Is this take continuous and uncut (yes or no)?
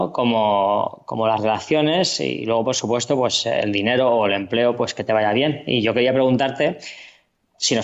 yes